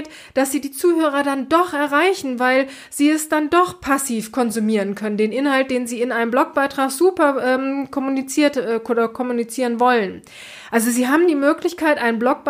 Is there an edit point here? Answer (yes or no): no